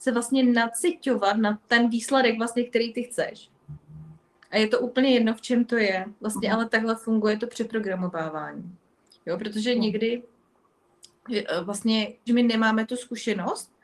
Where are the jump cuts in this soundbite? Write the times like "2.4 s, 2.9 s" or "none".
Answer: 1.6 s, 6.2 s, 12.3 s